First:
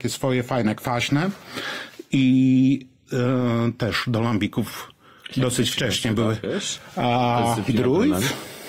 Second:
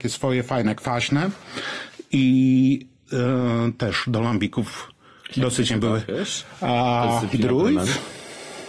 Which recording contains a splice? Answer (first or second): second